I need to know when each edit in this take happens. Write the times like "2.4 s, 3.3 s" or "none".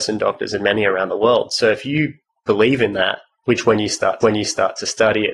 4.2 s